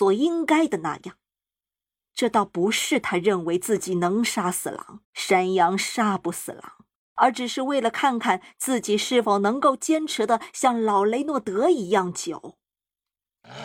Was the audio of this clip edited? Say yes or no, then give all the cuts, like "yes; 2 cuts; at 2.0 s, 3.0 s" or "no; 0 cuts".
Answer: yes; 2 cuts; at 5.0 s, 7.0 s